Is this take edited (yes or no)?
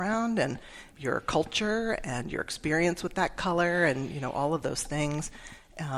yes